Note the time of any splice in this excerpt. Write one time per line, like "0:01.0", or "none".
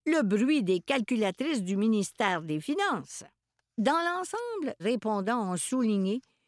0:03.4
0:04.8